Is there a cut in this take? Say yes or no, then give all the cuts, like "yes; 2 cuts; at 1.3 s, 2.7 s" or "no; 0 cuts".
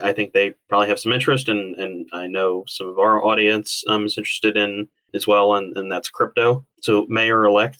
no; 0 cuts